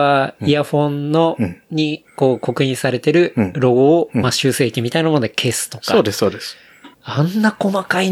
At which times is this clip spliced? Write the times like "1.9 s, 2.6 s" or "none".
2.1 s, 6.9 s